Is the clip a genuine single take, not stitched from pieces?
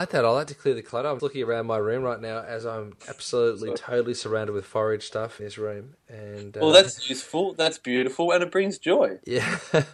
no; 2 cuts; at 1.2 s, 5.4 s

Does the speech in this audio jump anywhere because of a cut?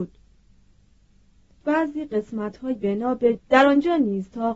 yes; 3 cuts; at 1.6 s, 2.8 s, 3.4 s

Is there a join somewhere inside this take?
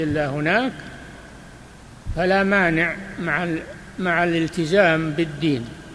no; 0 cuts

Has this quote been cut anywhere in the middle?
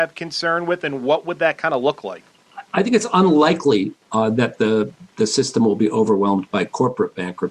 no; 0 cuts

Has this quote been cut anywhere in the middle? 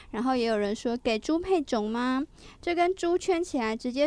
no; 0 cuts

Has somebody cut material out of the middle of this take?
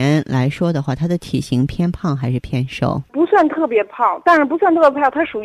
yes; 1 cut; at 3.1 s

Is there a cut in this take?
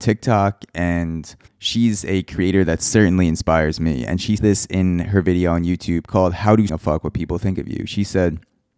yes; 3 cuts; at 1.5 s, 4.4 s, 6.7 s

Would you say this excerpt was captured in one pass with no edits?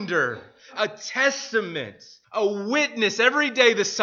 no; 1 cut; at 2.2 s

